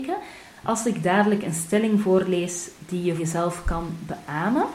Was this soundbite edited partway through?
yes; 1 cut; at 3.2 s

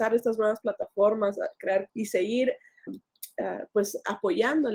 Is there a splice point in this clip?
yes; 2 cuts; at 1.9 s, 2.9 s

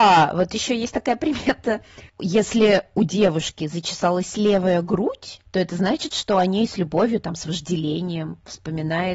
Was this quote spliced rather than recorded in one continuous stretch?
no; 0 cuts

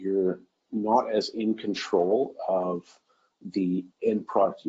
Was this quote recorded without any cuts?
yes; 0 cuts

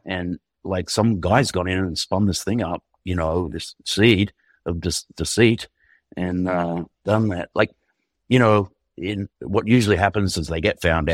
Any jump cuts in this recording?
yes; 1 cut; at 9.3 s

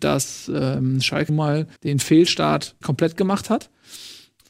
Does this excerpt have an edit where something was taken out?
yes; 3 cuts; at 1.3 s, 1.8 s, 2.8 s

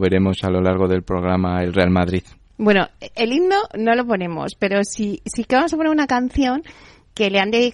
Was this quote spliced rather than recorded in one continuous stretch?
no; 0 cuts

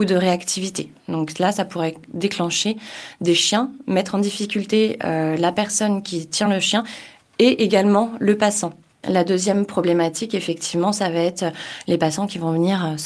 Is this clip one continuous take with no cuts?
yes; 0 cuts

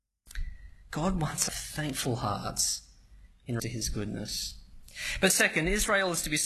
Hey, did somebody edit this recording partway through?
yes; 2 cuts; at 1.5 s, 3.6 s

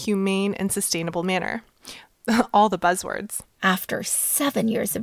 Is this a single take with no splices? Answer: yes; 0 cuts

